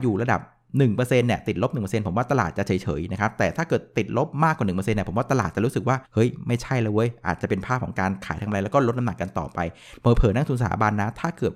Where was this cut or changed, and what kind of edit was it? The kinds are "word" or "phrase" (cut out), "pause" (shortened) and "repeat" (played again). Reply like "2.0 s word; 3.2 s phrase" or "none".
6.1 s pause